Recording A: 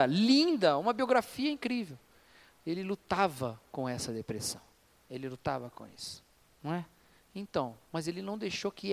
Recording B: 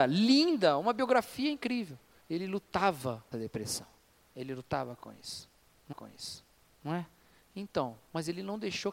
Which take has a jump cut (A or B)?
B